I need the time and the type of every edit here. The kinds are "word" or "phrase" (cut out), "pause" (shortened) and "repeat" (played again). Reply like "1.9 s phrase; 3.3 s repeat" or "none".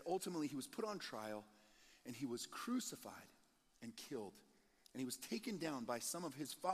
none